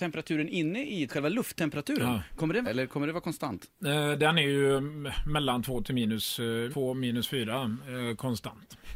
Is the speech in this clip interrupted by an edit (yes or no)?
yes